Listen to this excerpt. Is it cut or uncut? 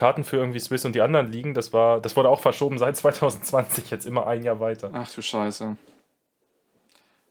uncut